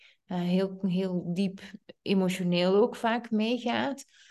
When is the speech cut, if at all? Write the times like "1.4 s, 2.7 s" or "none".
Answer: none